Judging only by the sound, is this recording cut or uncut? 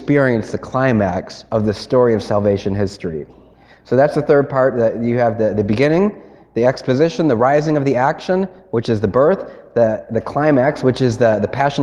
uncut